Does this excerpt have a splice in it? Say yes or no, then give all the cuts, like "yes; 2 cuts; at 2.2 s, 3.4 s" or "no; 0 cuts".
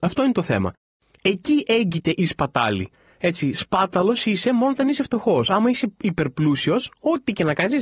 no; 0 cuts